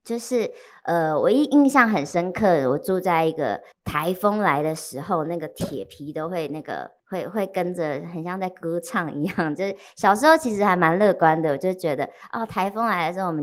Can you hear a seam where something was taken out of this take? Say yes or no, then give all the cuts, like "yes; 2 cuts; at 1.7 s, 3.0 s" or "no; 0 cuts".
yes; 2 cuts; at 3.7 s, 7.0 s